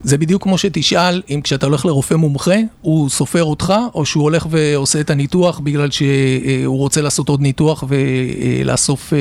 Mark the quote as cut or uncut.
uncut